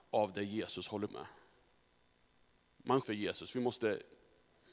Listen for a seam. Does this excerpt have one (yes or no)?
yes